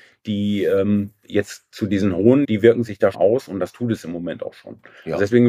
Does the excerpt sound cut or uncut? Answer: cut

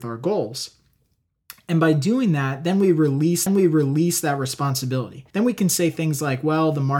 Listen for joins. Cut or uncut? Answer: cut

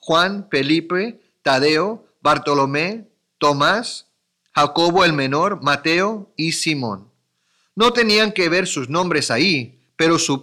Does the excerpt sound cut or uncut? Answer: uncut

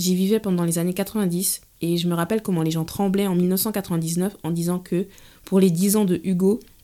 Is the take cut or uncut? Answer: uncut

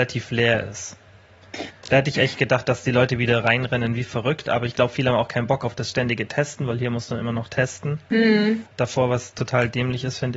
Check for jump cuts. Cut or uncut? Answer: cut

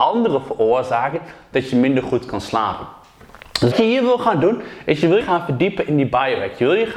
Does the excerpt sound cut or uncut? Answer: cut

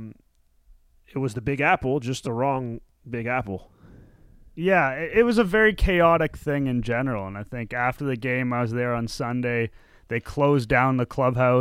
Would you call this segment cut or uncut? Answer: uncut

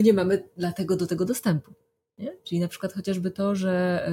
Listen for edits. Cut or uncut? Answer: uncut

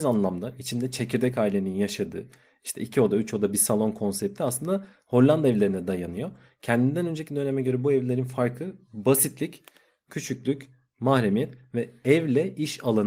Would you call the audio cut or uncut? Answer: uncut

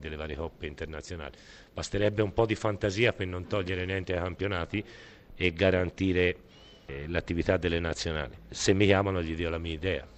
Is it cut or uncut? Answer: uncut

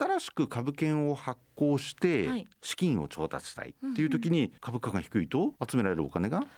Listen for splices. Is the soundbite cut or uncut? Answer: cut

